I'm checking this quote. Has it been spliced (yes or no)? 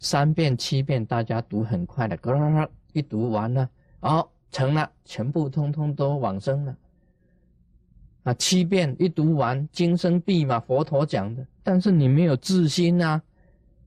no